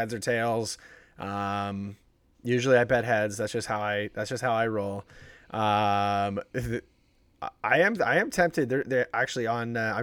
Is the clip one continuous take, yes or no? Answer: yes